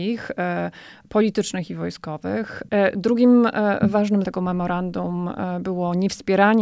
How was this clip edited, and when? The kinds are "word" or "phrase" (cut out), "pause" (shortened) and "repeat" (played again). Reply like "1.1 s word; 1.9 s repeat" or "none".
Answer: 4.2 s word